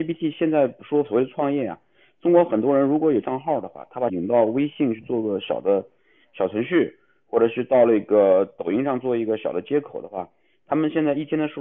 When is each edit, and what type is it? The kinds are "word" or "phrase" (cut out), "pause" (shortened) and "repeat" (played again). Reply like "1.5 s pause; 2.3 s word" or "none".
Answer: 3.2 s word; 4.1 s word